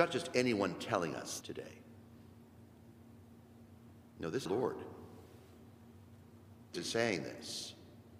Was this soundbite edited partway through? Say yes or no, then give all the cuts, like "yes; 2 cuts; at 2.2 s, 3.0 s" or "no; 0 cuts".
yes; 3 cuts; at 1.4 s, 4.5 s, 6.7 s